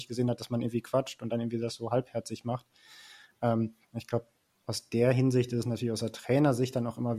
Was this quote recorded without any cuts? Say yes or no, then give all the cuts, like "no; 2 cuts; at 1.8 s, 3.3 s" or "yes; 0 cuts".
yes; 0 cuts